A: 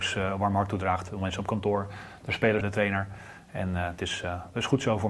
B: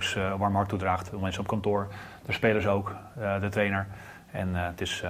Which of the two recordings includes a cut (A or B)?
A